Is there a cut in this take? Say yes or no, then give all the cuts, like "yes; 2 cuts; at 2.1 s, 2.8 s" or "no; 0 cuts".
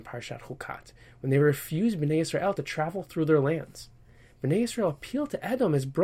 no; 0 cuts